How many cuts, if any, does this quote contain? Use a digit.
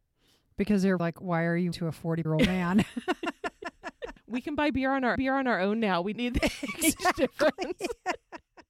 5